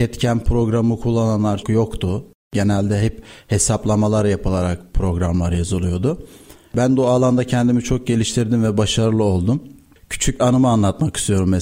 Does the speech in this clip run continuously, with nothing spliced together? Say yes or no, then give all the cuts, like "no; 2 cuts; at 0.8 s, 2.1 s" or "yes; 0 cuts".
no; 2 cuts; at 1.6 s, 10.4 s